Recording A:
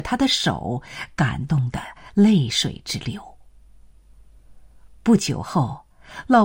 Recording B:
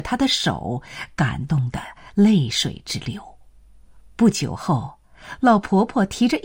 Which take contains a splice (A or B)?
B